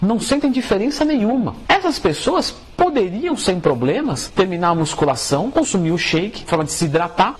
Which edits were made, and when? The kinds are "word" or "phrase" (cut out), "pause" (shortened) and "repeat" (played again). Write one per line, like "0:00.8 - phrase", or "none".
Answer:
0:06.5 - word